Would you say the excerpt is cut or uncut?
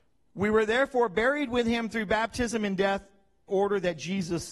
cut